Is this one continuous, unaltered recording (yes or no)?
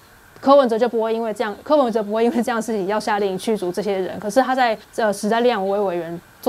no